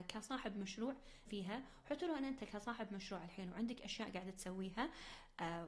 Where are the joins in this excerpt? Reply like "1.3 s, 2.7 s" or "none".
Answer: 1.3 s